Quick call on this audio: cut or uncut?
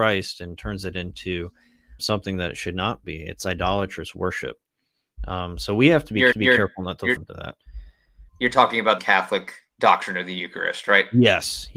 cut